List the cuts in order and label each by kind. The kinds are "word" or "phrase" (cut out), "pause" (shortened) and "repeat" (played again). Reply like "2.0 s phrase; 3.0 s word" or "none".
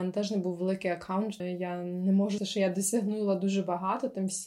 1.4 s word; 2.4 s word